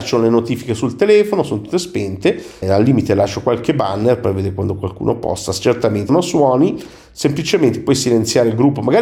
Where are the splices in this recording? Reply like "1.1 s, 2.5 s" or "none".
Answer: 2.6 s, 6.1 s